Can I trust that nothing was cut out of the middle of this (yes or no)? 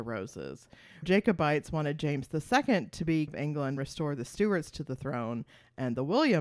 no